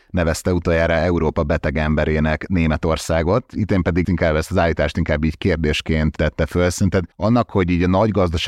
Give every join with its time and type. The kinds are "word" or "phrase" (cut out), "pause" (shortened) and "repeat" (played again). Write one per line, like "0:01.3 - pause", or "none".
0:04.0 - word
0:07.1 - pause